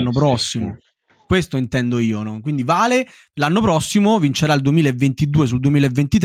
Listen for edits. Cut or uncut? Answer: uncut